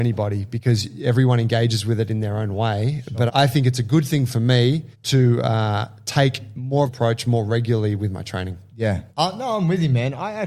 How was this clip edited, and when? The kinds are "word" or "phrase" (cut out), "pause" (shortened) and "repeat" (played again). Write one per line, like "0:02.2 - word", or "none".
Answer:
0:03.3 - phrase
0:04.9 - pause
0:06.9 - phrase
0:09.1 - pause